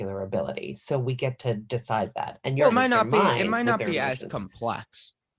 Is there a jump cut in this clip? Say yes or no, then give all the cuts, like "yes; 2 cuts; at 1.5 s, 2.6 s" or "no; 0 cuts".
yes; 1 cut; at 2.7 s